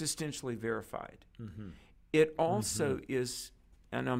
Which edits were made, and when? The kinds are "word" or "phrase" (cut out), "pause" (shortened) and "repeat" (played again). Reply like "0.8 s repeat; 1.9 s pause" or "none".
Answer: none